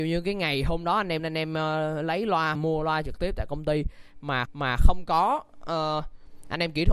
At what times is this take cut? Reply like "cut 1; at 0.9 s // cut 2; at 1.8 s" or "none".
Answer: cut 1; at 1.2 s // cut 2; at 2.6 s // cut 3; at 4.5 s